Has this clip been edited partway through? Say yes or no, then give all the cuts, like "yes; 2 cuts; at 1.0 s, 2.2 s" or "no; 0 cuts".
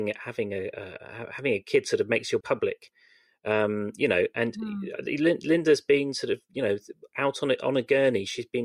yes; 1 cut; at 2.4 s